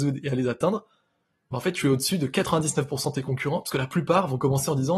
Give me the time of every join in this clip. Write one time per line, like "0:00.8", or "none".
none